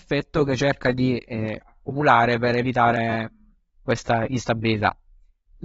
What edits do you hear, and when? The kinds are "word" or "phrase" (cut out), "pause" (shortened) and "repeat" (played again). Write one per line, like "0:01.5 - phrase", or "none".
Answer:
none